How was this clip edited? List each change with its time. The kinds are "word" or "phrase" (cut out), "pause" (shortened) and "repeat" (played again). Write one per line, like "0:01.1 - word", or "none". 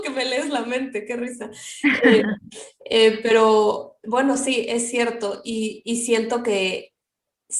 none